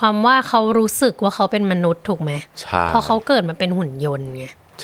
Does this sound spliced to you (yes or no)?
yes